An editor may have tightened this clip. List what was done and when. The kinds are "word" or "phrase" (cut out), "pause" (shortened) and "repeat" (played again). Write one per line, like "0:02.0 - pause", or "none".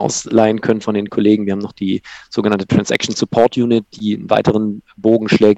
none

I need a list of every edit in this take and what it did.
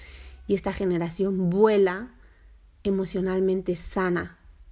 none

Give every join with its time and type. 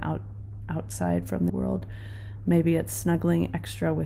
0:01.5 - word

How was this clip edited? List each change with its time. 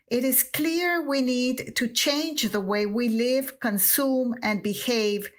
none

